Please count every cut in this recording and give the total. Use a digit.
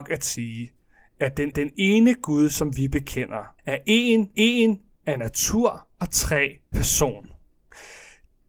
5